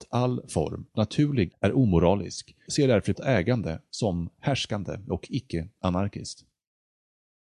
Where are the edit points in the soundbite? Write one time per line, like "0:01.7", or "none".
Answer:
0:00.9
0:01.5
0:02.7
0:03.1